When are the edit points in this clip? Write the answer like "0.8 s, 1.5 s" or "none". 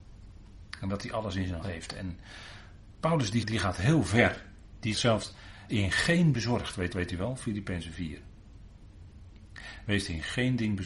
1.6 s, 3.4 s, 4.9 s, 5.7 s, 6.3 s, 6.9 s